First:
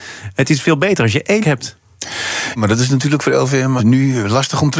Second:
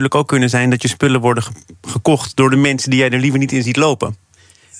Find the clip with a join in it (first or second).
first